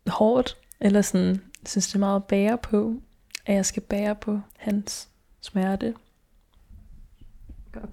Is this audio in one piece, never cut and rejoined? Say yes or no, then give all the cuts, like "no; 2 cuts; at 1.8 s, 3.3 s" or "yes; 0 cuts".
no; 1 cut; at 4.5 s